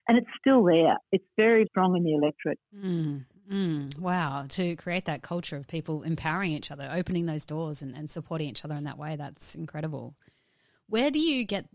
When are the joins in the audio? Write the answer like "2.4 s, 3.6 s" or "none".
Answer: 1.7 s, 2.7 s